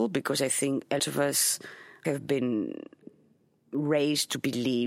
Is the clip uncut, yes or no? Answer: no